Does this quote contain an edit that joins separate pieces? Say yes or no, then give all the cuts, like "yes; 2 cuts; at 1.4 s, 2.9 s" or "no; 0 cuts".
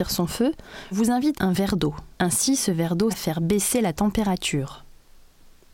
yes; 4 cuts; at 0.9 s, 1.3 s, 2.1 s, 3.1 s